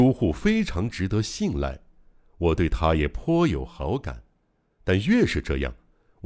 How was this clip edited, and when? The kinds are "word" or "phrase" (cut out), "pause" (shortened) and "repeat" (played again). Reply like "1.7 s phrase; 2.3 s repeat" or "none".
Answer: none